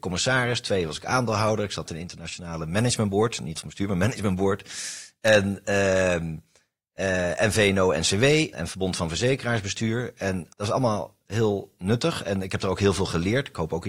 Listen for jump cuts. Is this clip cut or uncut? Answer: cut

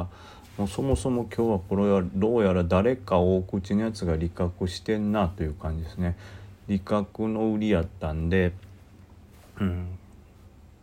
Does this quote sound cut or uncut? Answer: uncut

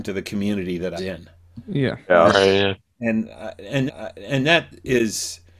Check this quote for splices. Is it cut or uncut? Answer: cut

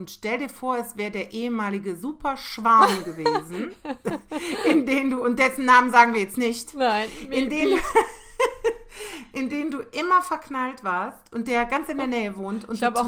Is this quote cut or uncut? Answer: uncut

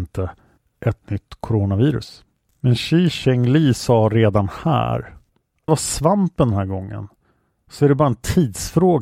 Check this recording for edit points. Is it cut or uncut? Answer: cut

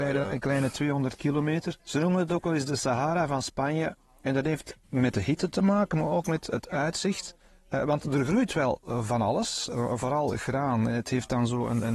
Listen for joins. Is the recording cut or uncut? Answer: cut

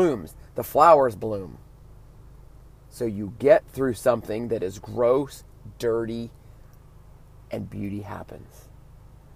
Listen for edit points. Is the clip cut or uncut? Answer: uncut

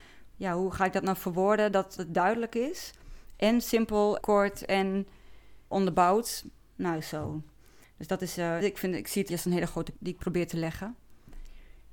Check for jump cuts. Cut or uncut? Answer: cut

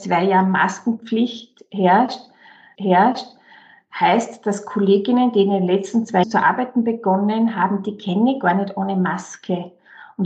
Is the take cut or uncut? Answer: cut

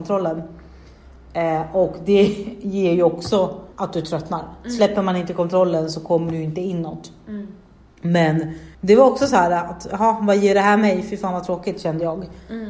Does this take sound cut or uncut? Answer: cut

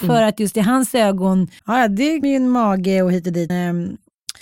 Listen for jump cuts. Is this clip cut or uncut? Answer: cut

